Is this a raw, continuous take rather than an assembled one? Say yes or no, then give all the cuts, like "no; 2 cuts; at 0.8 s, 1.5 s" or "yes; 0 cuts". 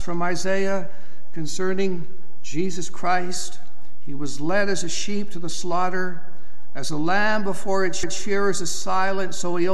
no; 1 cut; at 8.0 s